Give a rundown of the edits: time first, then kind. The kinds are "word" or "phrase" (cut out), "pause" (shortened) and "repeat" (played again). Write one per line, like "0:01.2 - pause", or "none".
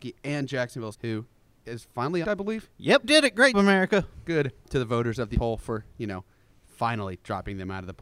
0:00.9 - word
0:02.2 - word
0:03.0 - word
0:03.5 - word
0:04.6 - word
0:05.3 - word